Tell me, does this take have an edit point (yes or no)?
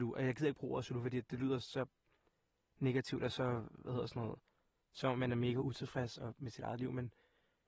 no